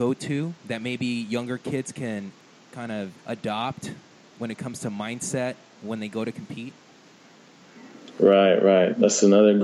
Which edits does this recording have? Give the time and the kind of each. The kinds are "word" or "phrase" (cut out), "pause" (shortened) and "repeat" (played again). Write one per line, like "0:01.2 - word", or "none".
0:03.2 - pause